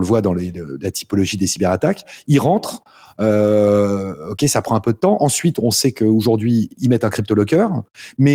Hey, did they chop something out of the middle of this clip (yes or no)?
no